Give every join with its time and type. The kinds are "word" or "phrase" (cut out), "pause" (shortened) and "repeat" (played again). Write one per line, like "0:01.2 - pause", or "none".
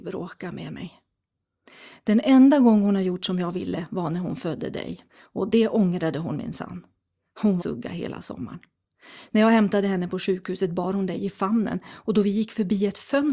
0:05.1 - pause
0:07.6 - phrase